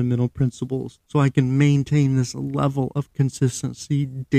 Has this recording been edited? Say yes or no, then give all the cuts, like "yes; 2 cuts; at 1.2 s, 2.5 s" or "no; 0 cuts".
yes; 1 cut; at 1.0 s